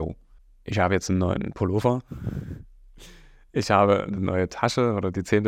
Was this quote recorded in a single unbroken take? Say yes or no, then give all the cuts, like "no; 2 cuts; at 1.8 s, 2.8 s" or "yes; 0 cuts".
yes; 0 cuts